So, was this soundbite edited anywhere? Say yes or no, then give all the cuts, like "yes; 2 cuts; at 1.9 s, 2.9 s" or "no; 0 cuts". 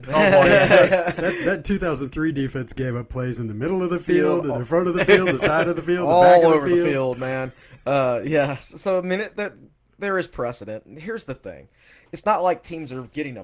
yes; 1 cut; at 10.8 s